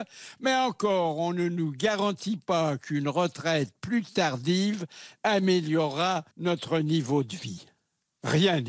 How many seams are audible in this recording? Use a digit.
1